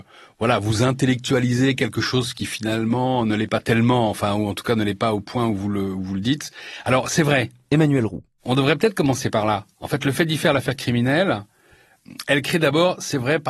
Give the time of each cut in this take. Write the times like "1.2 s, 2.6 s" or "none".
9.7 s